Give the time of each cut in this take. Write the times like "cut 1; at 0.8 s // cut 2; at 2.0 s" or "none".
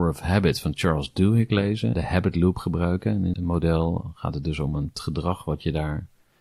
cut 1; at 1.9 s // cut 2; at 3.3 s // cut 3; at 4.9 s